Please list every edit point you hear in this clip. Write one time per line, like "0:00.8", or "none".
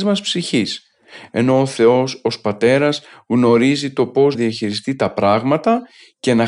0:04.3